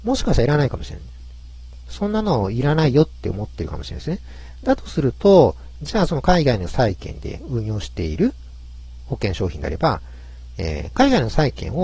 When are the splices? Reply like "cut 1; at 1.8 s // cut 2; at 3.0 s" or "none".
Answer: none

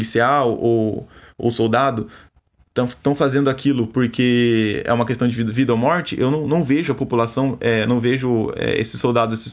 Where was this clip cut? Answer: none

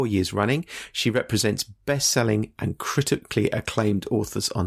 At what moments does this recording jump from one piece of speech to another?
none

